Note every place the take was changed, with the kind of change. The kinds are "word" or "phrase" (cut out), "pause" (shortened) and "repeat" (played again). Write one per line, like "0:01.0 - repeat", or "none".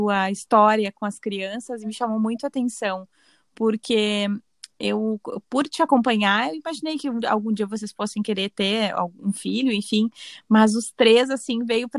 none